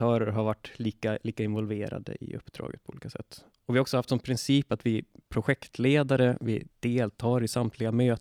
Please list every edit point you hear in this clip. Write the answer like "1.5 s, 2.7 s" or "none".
6.7 s